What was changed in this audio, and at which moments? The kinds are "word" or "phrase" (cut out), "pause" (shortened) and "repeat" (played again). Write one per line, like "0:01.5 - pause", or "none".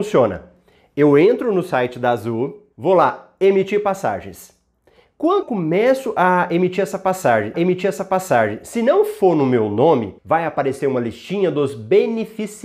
0:02.7 - pause
0:05.4 - word
0:07.5 - repeat
0:10.2 - pause